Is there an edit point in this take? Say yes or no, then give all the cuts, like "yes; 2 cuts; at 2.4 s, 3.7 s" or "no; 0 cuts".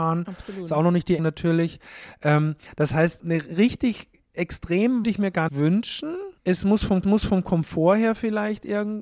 yes; 6 cuts; at 1.2 s, 3.2 s, 5.0 s, 5.5 s, 6.4 s, 7.0 s